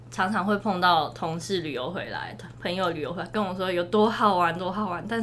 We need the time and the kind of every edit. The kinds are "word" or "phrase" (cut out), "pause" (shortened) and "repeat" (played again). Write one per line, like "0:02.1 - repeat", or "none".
none